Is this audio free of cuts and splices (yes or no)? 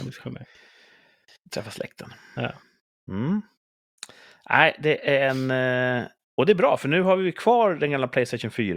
yes